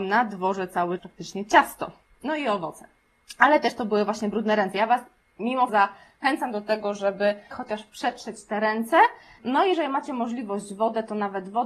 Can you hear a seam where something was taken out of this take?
yes; 3 cuts; at 1.0 s, 5.7 s, 7.5 s

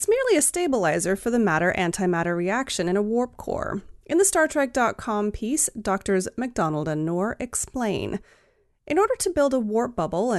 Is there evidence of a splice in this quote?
yes; 1 cut; at 4.0 s

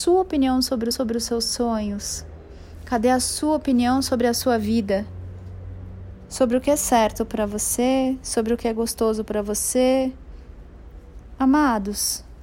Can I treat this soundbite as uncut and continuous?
no; 1 cut; at 0.9 s

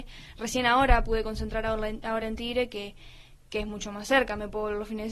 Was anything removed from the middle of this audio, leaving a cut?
no; 0 cuts

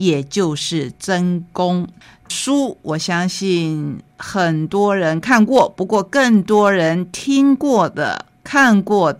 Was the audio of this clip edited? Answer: no; 0 cuts

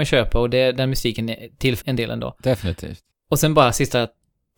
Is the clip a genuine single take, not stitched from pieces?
no; 2 cuts; at 1.8 s, 3.1 s

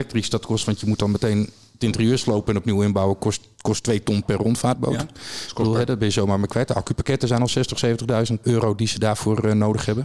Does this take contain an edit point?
no; 0 cuts

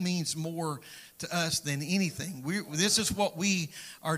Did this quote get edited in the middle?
no; 0 cuts

